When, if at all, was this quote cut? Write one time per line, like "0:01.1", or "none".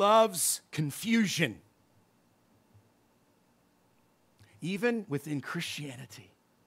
none